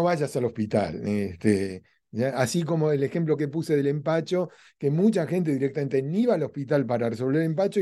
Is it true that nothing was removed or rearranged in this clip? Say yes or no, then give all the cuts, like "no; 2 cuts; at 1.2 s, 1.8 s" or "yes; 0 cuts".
yes; 0 cuts